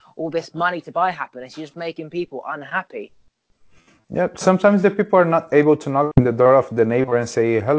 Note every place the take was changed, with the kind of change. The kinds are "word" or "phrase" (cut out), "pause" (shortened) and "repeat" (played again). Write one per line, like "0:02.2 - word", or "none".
none

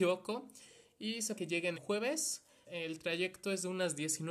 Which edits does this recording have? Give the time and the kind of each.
0:01.4 - word
0:01.7 - word
0:02.6 - word

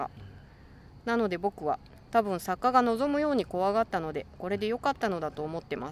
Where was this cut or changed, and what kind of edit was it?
0:02.0 - pause

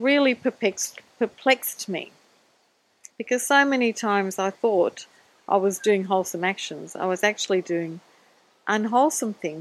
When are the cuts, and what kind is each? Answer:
none

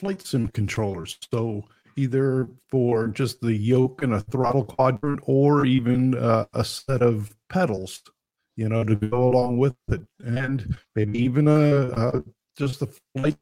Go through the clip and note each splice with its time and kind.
none

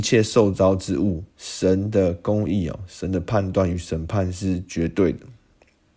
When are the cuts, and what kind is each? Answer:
0:01.3 - pause

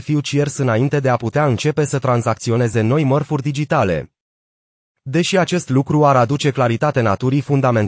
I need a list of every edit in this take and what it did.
none

